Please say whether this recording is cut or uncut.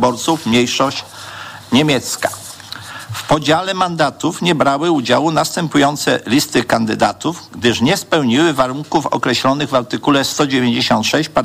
uncut